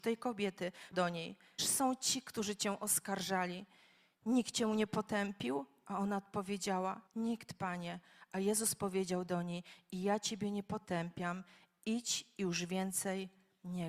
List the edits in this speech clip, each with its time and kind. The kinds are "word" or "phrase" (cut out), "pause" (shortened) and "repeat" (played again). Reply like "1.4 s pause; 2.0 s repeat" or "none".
0.9 s word; 1.6 s phrase; 7.1 s pause